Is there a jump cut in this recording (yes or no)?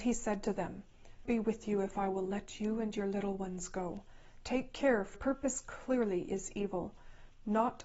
yes